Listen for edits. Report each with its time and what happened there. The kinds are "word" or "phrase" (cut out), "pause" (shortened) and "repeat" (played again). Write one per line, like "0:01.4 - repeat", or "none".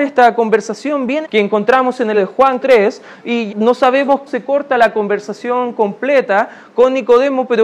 0:01.2 - word
0:02.1 - word
0:02.6 - word
0:03.5 - word
0:04.3 - word